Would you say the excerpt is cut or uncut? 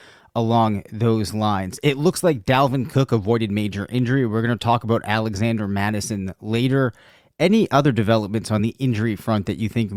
uncut